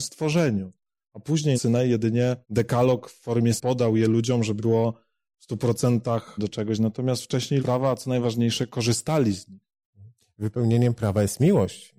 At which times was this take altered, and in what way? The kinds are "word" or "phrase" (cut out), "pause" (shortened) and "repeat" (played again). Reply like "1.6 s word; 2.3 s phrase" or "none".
1.5 s phrase; 2.4 s pause; 3.6 s word; 4.6 s word; 6.4 s word; 7.6 s phrase